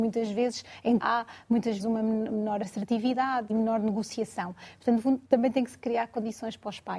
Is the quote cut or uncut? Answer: cut